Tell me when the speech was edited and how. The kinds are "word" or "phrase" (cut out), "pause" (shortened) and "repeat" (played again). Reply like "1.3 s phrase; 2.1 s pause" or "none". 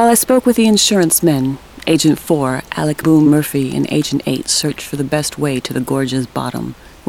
3.0 s word